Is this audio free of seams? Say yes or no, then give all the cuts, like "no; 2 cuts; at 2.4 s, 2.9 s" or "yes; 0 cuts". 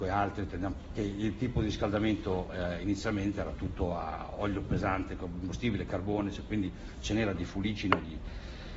no; 1 cut; at 0.9 s